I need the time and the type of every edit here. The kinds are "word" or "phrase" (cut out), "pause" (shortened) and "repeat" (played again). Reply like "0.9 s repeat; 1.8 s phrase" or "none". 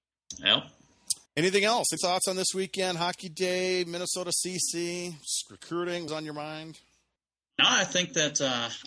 1.3 s pause; 2.0 s word; 6.1 s word; 7.2 s pause